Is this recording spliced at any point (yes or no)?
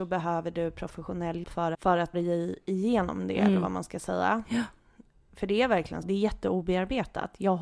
yes